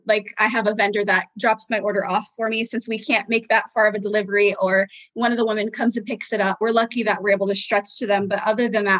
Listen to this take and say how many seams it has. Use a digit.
1